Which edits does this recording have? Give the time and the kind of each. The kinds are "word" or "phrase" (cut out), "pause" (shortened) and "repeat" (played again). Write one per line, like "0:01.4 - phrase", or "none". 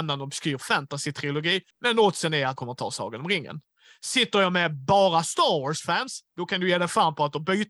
0:01.7 - pause
0:02.6 - word